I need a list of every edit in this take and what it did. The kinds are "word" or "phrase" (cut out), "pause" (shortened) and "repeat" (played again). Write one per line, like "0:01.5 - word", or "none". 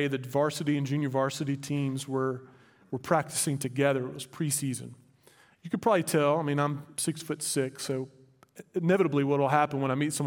none